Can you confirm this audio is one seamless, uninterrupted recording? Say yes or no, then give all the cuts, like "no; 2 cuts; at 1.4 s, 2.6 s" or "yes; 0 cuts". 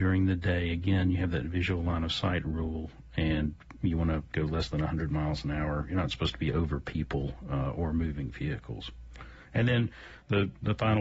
yes; 0 cuts